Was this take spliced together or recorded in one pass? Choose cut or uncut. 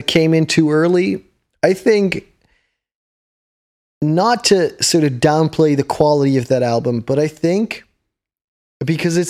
uncut